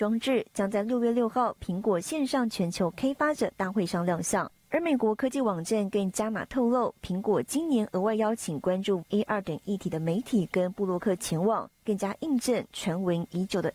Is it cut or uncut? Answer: cut